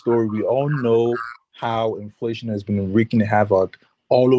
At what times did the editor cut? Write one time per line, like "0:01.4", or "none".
none